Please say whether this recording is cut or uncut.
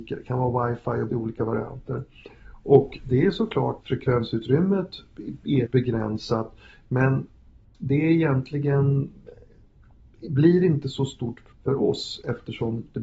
cut